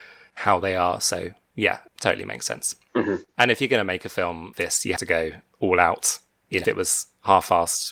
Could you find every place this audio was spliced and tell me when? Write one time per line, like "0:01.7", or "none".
0:01.9
0:04.5
0:05.0
0:06.6